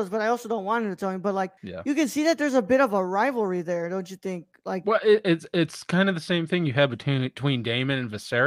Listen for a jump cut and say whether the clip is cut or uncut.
cut